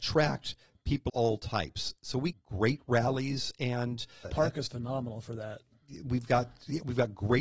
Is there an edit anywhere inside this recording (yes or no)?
yes